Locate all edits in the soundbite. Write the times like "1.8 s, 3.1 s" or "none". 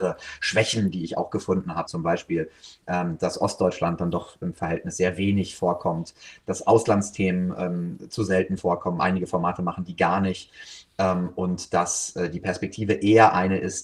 1.9 s